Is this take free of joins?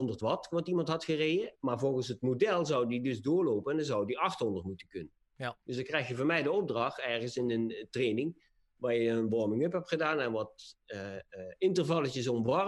yes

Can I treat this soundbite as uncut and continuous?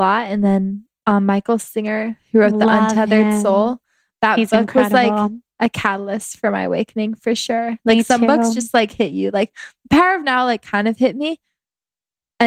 yes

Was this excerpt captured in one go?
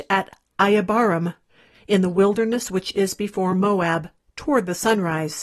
yes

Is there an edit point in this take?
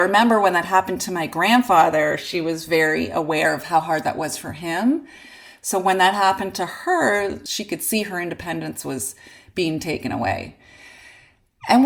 no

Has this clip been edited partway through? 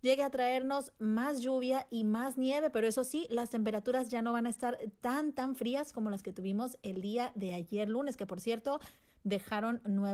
no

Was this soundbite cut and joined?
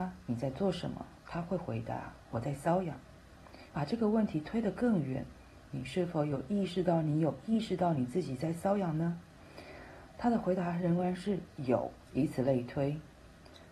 yes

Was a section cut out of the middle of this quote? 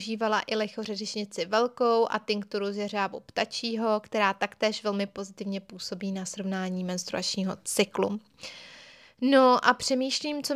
no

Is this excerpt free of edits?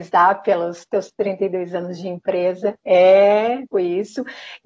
no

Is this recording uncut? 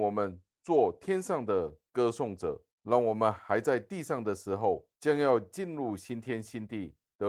no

